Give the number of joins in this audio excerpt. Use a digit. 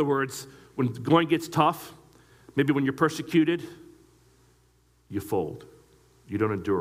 0